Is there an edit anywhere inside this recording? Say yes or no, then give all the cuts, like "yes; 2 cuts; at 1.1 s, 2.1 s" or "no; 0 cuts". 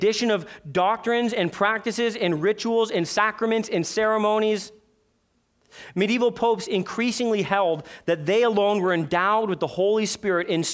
no; 0 cuts